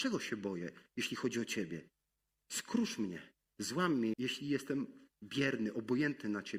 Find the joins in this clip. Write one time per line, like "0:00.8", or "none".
0:02.1
0:03.4
0:04.1

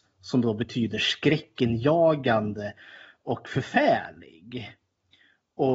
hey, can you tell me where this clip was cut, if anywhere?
none

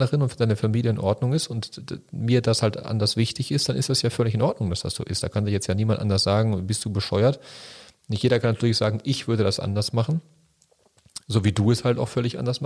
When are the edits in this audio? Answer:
none

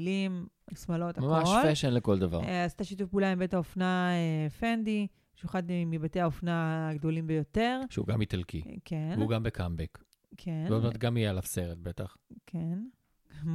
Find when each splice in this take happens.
none

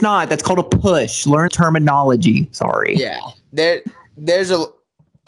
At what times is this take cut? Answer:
0:01.5
0:03.4

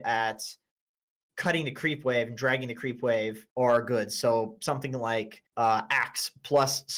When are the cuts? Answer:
0:03.5
0:05.5

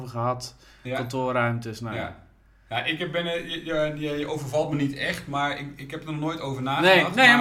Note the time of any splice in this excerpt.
none

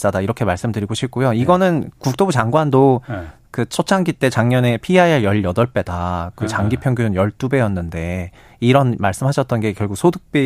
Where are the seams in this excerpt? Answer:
none

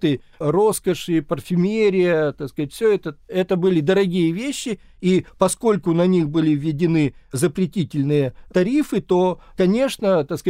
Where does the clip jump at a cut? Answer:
none

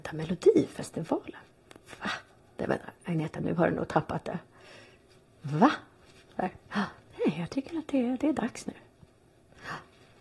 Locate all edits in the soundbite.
none

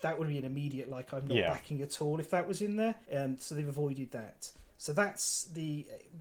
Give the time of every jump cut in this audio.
0:03.0

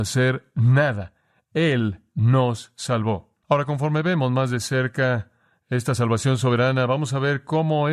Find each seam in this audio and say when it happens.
0:03.4

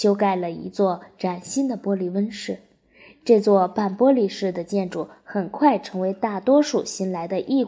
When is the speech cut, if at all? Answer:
none

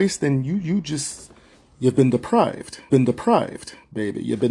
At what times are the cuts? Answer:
0:01.5
0:02.9

